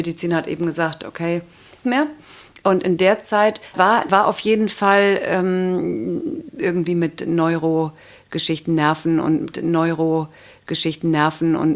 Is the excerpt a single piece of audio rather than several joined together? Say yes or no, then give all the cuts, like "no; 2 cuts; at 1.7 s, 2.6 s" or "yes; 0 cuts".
no; 4 cuts; at 1.8 s, 3.7 s, 4.1 s, 9.5 s